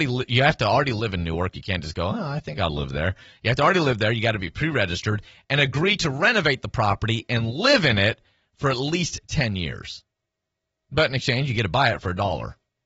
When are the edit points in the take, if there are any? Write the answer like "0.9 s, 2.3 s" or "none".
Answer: none

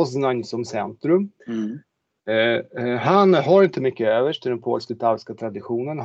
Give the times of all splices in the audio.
1.4 s

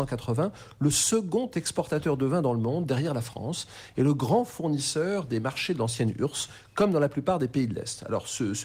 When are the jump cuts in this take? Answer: none

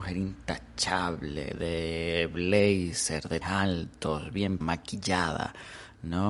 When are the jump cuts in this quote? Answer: 3.4 s, 4.6 s

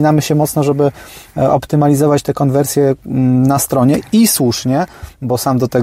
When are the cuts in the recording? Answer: none

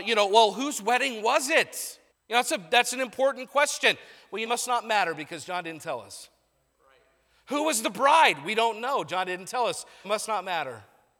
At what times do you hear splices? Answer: 2.1 s, 4.5 s, 10.0 s

